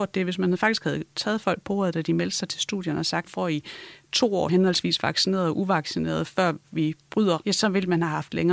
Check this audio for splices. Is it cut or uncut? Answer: cut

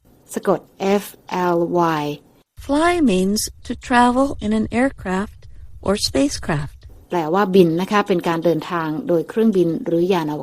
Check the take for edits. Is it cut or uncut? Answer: uncut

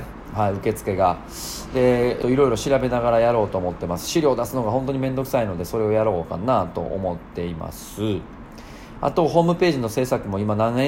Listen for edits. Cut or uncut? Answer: cut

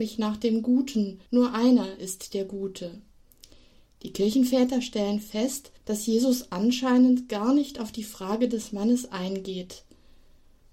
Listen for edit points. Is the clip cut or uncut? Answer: cut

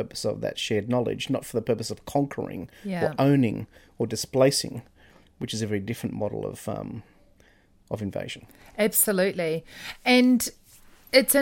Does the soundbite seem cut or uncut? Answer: uncut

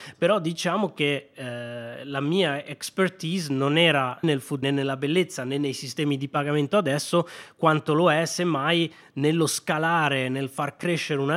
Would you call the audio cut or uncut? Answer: cut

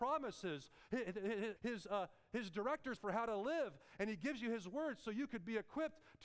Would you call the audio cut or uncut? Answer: cut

